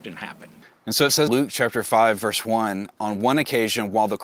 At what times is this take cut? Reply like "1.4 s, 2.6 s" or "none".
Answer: 1.3 s